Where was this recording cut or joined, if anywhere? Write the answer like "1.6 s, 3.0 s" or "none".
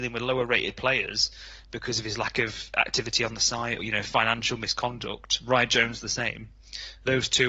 3.8 s